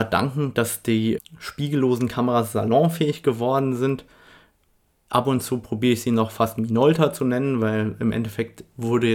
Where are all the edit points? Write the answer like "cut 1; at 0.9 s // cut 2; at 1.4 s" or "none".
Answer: cut 1; at 1.2 s